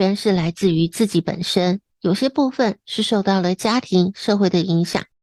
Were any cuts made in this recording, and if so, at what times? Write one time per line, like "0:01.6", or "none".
0:01.9